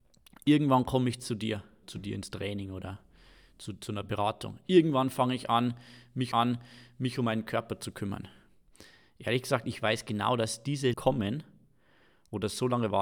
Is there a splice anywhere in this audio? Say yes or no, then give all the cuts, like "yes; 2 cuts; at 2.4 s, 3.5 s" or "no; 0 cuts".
yes; 3 cuts; at 1.8 s, 6.3 s, 10.9 s